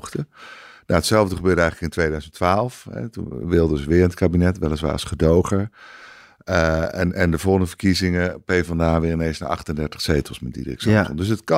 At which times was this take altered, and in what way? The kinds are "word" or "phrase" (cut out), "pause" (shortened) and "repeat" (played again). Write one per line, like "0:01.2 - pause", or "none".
none